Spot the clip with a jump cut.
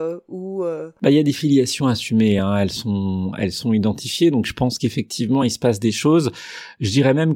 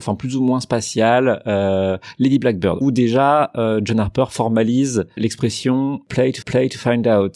second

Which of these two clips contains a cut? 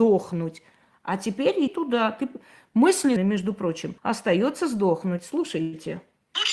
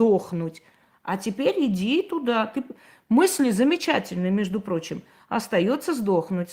first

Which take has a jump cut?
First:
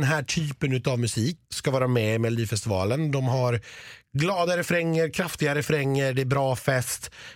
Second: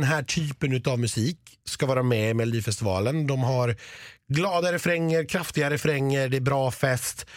first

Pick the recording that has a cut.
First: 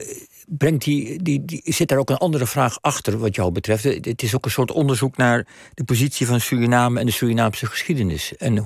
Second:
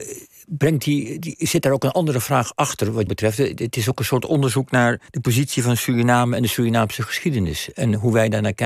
second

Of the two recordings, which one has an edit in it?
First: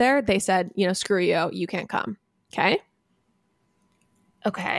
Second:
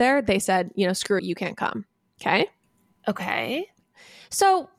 second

